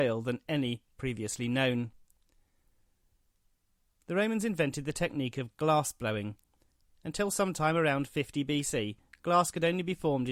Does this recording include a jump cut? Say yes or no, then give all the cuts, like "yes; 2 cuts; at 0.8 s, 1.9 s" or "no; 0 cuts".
no; 0 cuts